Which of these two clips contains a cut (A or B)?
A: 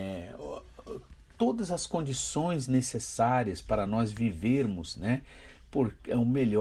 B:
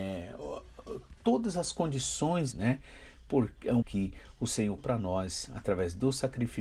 B